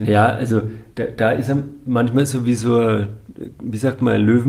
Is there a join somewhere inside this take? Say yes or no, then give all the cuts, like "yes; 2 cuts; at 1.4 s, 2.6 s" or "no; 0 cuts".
no; 0 cuts